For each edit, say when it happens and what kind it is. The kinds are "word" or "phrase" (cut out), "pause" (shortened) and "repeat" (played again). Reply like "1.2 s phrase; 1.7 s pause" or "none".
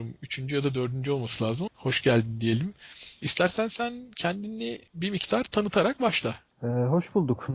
1.7 s word; 4.9 s pause